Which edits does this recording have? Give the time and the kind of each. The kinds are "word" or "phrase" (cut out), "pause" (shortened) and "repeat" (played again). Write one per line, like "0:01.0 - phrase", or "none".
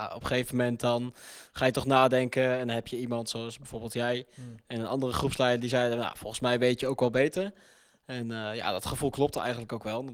none